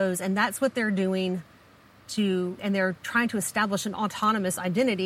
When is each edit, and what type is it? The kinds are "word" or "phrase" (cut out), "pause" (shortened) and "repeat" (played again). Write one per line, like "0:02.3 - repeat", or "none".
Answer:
0:02.6 - word